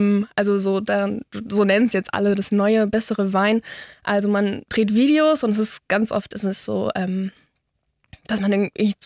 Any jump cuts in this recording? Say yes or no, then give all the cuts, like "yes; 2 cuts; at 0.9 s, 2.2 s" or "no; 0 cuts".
no; 0 cuts